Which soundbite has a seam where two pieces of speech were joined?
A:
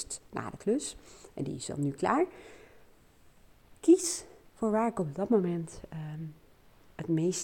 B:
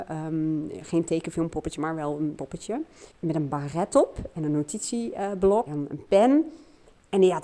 B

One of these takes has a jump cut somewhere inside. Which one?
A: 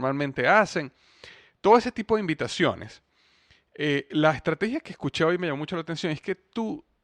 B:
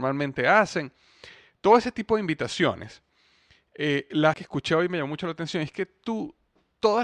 B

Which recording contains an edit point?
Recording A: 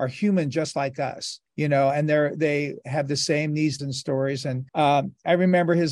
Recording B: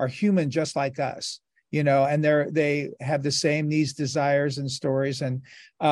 A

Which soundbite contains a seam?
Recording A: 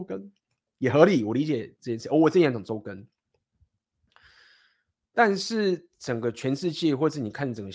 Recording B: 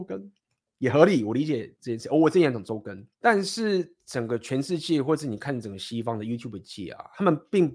B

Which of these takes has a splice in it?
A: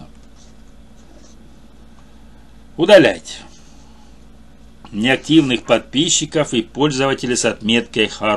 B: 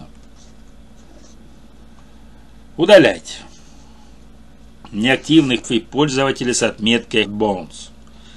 B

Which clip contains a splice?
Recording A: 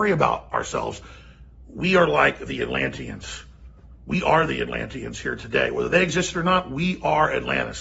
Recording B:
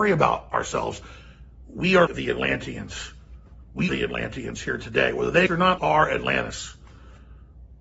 B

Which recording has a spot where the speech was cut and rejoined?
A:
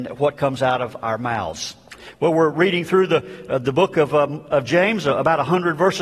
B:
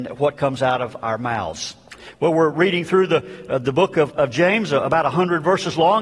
B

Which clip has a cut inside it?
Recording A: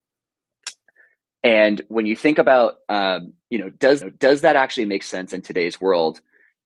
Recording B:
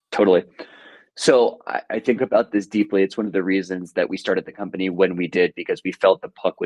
A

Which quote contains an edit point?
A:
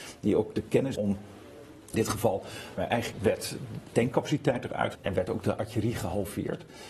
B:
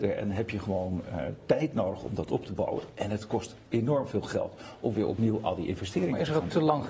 A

